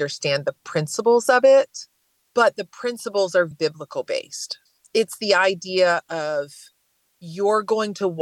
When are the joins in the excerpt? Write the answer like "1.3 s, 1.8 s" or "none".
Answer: 2.0 s, 3.5 s